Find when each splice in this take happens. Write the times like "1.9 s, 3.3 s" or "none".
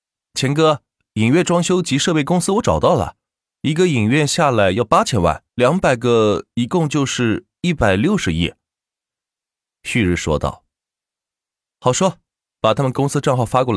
5.5 s